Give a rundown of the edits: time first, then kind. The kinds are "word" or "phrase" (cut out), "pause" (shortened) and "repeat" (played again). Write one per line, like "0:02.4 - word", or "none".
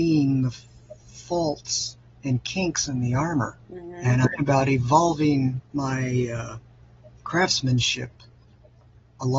0:01.0 - pause
0:03.6 - pause
0:04.3 - word
0:05.7 - pause